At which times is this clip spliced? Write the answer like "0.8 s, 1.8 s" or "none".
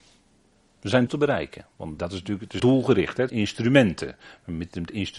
1.1 s, 2.0 s, 2.6 s, 3.3 s